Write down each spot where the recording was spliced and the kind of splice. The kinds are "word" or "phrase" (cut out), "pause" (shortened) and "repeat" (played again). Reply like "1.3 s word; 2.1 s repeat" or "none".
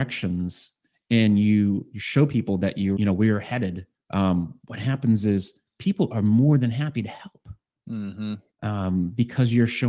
3.0 s word; 3.9 s pause; 8.5 s pause